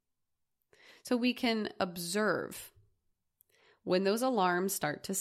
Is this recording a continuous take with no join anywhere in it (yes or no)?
yes